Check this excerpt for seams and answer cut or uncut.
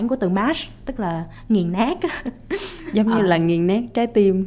uncut